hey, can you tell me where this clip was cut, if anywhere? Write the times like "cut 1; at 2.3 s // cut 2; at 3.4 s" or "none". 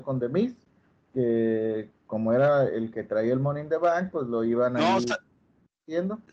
none